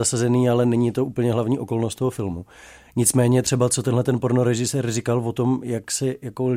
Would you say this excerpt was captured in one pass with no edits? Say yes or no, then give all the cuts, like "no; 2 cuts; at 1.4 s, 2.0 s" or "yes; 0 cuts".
yes; 0 cuts